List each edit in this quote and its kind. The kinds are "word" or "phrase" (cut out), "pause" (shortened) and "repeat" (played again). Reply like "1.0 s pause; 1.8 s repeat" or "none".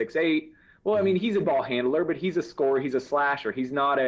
1.4 s word